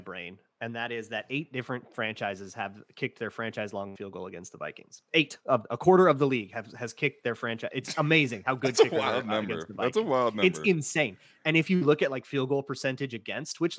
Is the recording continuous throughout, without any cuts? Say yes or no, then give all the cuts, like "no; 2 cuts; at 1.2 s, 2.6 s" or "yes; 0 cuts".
yes; 0 cuts